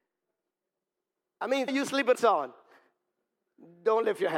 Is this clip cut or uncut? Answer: cut